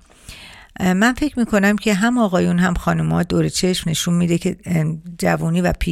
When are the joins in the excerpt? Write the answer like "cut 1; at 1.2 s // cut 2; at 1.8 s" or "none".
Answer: none

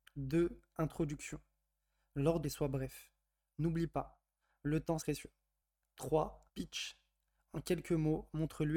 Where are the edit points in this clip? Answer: cut 1; at 2.4 s // cut 2; at 5.0 s // cut 3; at 6.5 s

